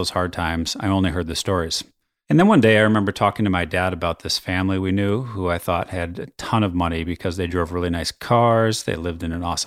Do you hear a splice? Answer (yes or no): no